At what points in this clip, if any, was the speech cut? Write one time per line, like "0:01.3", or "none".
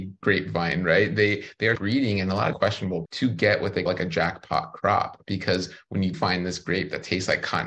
0:01.7
0:02.5
0:03.0
0:03.9
0:06.1

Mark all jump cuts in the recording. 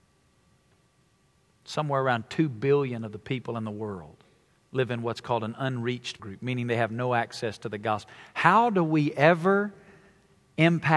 0:04.5
0:06.2

